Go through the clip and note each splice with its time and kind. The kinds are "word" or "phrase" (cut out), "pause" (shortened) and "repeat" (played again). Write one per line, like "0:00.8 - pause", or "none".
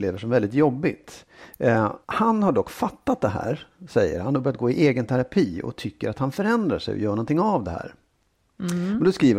0:02.0 - pause